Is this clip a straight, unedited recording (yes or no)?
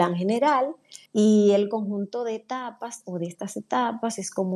no